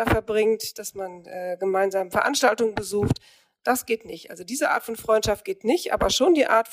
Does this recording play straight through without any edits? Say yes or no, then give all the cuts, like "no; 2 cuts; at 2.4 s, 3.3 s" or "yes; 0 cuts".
yes; 0 cuts